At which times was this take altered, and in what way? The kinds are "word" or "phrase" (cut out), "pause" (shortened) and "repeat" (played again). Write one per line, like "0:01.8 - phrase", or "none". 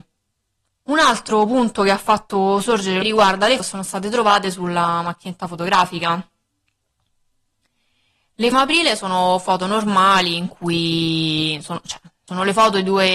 0:03.0 - phrase
0:03.6 - word
0:08.5 - phrase